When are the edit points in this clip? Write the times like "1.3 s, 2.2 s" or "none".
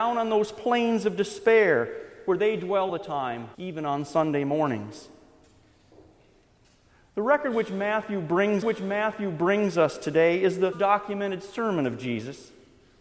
2.9 s, 3.5 s, 8.6 s, 10.7 s